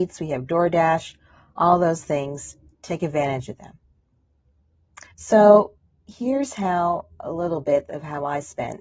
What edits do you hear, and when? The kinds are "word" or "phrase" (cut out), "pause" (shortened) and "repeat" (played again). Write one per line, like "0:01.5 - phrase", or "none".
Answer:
0:05.1 - pause